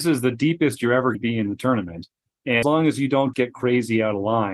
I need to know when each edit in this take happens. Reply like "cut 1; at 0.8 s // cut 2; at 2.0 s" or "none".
cut 1; at 1.1 s // cut 2; at 2.6 s // cut 3; at 3.3 s